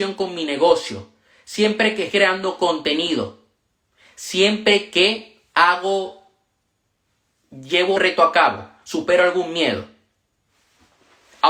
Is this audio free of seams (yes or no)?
no